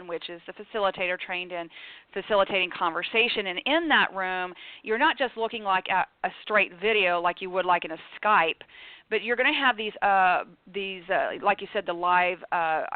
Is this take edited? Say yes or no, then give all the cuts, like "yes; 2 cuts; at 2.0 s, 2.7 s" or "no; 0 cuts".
no; 0 cuts